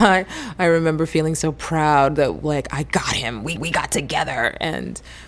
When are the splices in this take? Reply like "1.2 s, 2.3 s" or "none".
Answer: 3.6 s